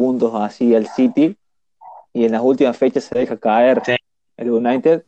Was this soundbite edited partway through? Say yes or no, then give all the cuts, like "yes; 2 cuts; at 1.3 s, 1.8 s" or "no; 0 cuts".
no; 0 cuts